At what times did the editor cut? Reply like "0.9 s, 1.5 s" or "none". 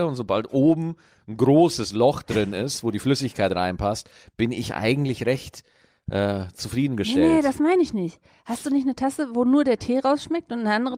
none